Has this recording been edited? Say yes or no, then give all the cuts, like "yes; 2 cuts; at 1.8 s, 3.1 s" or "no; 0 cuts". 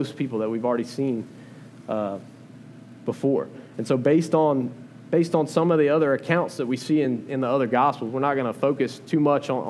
no; 0 cuts